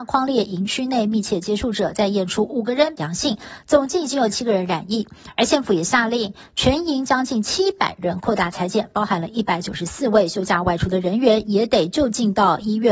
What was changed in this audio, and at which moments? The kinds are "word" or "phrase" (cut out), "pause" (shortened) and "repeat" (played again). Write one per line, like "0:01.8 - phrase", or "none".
0:03.0 - word